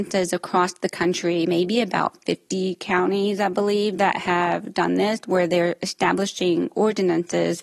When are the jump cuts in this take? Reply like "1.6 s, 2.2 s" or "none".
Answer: none